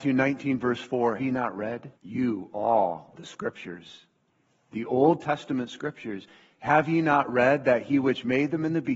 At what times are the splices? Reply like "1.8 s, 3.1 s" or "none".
1.2 s, 2.0 s, 3.1 s